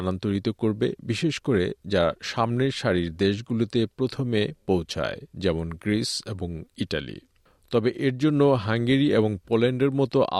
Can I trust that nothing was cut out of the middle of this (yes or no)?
yes